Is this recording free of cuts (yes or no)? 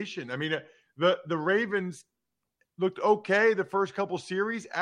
yes